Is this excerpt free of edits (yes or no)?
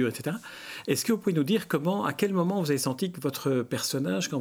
yes